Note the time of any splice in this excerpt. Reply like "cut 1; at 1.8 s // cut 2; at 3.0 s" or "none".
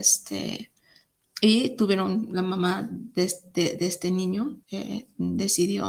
cut 1; at 4.6 s